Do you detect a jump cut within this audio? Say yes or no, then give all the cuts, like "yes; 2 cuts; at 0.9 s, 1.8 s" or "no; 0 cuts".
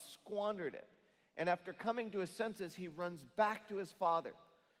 no; 0 cuts